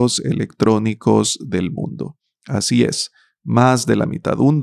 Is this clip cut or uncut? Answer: uncut